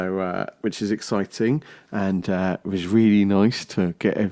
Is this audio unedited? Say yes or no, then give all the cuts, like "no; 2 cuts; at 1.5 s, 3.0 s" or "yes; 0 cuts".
yes; 0 cuts